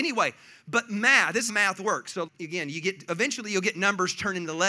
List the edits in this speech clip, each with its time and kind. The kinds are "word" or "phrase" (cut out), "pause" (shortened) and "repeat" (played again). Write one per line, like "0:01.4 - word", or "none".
0:01.5 - word
0:02.3 - word